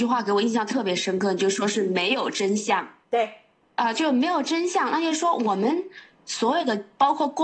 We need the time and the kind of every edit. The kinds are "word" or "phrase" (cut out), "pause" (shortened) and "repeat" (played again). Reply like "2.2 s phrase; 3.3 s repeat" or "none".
3.0 s pause